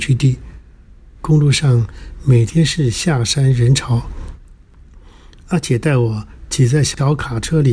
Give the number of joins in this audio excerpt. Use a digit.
0